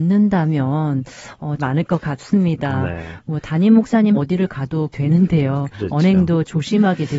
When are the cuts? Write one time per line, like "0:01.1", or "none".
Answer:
0:01.6
0:04.1
0:04.9